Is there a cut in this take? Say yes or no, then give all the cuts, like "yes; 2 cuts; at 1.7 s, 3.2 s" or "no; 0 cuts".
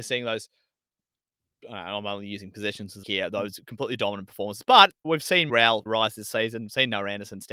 yes; 4 cuts; at 3.0 s, 5.0 s, 5.5 s, 5.9 s